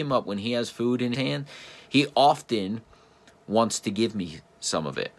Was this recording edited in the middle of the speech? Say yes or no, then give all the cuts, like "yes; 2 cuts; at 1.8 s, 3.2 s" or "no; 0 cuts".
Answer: yes; 1 cut; at 1.1 s